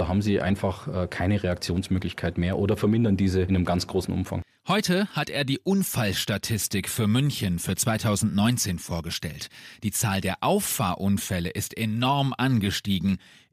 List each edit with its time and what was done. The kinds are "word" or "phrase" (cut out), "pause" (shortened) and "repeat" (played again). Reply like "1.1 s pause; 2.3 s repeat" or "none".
none